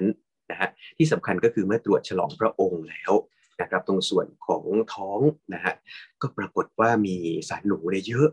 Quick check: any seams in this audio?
yes; 1 cut; at 5.4 s

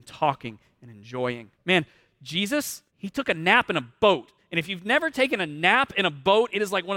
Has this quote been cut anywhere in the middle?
yes; 2 cuts; at 1.5 s, 2.9 s

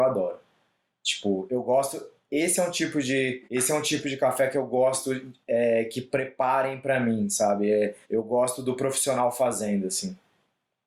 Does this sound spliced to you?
yes; 2 cuts; at 3.4 s, 8.0 s

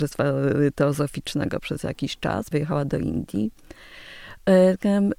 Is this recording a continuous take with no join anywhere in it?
no; 1 cut; at 2.5 s

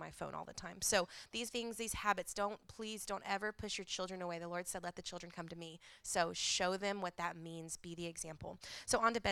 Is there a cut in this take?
yes; 1 cut; at 1.5 s

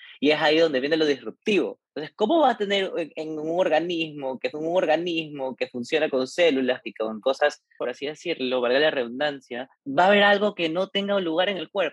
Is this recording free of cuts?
no; 6 cuts; at 1.9 s, 4.5 s, 6.8 s, 7.2 s, 7.8 s, 9.8 s

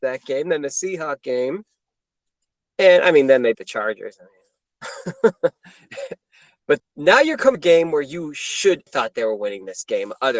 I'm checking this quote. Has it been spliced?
yes; 4 cuts; at 3.5 s, 6.8 s, 7.5 s, 8.9 s

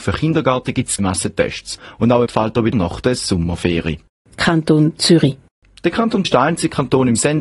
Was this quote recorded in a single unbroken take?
no; 4 cuts; at 1.0 s, 2.3 s, 2.7 s, 6.2 s

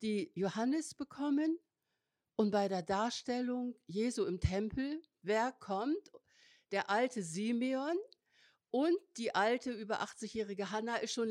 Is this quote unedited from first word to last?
yes; 0 cuts

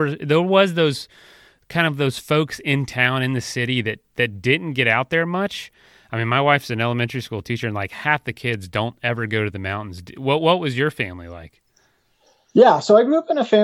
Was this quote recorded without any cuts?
yes; 0 cuts

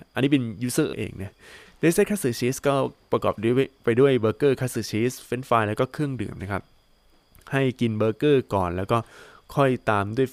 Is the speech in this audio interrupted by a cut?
yes; 1 cut; at 0.9 s

